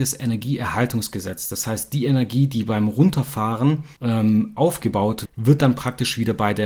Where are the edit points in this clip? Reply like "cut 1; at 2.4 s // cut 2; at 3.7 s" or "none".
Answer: cut 1; at 4.0 s // cut 2; at 5.2 s